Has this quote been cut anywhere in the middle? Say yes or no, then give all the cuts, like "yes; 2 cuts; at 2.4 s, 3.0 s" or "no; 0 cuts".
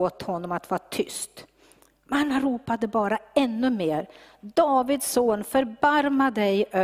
no; 0 cuts